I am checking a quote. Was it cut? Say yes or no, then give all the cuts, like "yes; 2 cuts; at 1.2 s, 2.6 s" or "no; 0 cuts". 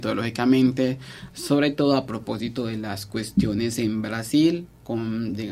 no; 0 cuts